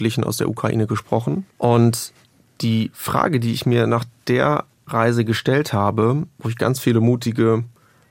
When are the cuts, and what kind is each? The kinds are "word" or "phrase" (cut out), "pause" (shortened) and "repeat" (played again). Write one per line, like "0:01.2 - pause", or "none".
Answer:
0:01.5 - pause